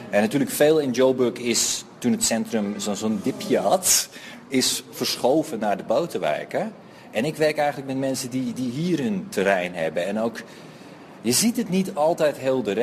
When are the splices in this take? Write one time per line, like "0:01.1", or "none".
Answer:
none